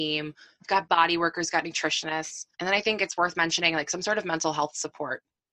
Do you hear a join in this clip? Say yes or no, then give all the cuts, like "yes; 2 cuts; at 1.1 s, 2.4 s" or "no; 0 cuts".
yes; 1 cut; at 2.5 s